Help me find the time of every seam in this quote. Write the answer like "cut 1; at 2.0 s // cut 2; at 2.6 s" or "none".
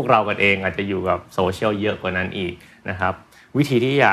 none